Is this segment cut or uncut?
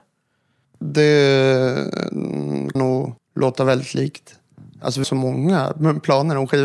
cut